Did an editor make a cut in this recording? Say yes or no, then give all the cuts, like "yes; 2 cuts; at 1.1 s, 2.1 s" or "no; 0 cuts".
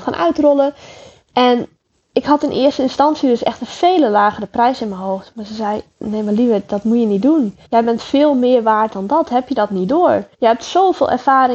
yes; 2 cuts; at 7.6 s, 10.3 s